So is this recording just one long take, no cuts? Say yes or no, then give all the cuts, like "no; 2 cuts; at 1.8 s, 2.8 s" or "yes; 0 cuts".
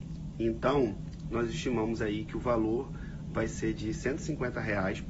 yes; 0 cuts